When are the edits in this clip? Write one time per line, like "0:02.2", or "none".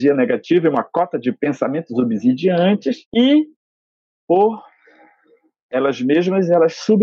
0:03.0